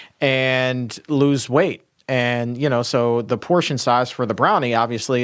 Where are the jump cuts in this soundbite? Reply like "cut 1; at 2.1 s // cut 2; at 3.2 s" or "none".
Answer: none